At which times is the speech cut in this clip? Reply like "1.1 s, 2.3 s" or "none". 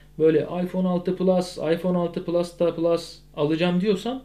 none

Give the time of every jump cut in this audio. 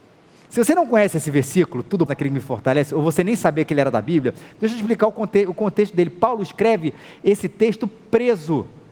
2.1 s

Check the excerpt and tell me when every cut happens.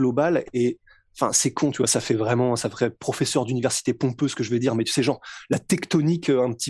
none

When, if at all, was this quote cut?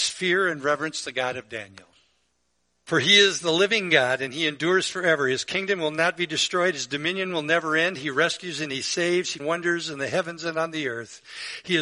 2.5 s, 9.4 s

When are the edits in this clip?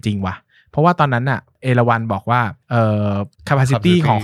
2.6 s, 3.3 s

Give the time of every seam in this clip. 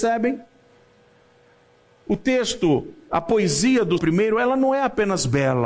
4.0 s

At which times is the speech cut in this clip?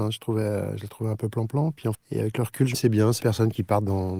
1.9 s, 2.7 s, 3.2 s

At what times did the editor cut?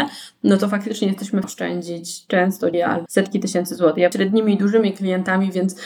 1.4 s, 2.7 s, 3.1 s, 4.1 s

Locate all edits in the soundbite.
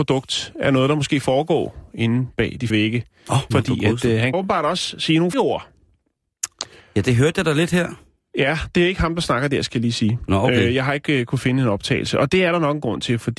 2.7 s, 3.5 s, 4.3 s, 5.3 s

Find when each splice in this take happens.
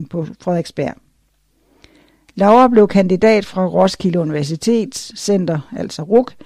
none

